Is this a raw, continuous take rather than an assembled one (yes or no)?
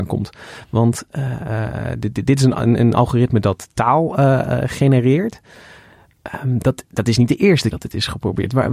no